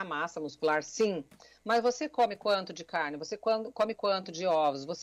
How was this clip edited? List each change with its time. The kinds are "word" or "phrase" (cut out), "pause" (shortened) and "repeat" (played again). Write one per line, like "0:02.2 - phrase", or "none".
none